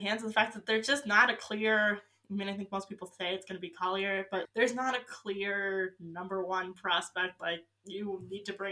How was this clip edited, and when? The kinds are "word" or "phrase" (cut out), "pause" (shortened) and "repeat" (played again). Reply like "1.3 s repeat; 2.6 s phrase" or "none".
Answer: 4.4 s word

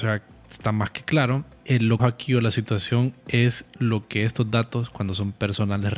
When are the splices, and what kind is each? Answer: 2.0 s word

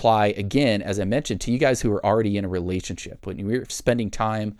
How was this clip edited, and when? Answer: 3.7 s word

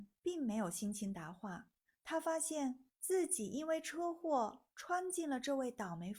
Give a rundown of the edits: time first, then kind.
1.8 s pause; 2.9 s pause

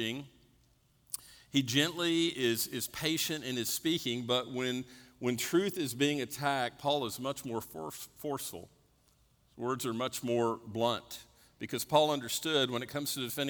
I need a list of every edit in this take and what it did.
none

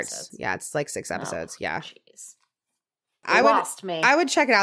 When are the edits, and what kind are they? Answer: none

